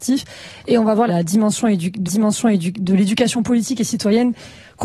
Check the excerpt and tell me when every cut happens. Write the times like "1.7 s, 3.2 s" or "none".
1.1 s, 2.1 s